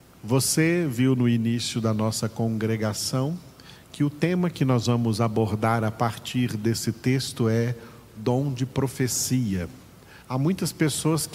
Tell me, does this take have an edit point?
yes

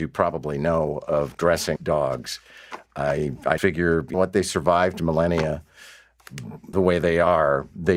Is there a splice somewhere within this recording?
yes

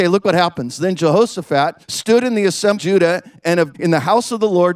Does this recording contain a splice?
yes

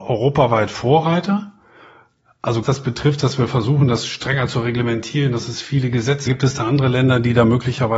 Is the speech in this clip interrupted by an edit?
yes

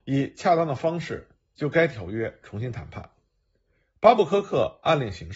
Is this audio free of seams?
yes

